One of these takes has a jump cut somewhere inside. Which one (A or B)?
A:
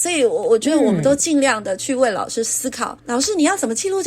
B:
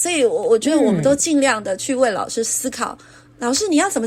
A